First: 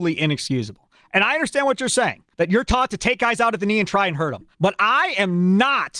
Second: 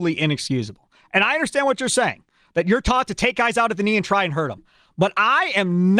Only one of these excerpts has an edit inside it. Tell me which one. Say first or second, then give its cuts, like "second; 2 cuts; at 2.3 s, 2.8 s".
first; 2 cuts; at 2.3 s, 4.5 s